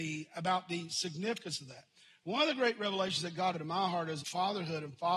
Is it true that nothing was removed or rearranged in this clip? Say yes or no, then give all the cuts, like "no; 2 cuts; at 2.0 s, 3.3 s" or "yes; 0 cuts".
no; 2 cuts; at 3.5 s, 4.2 s